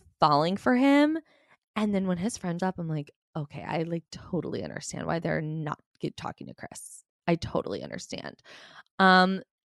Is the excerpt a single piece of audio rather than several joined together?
no; 1 cut; at 2.6 s

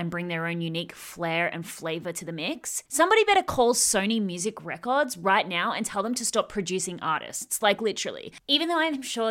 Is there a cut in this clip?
yes; 1 cut; at 2.9 s

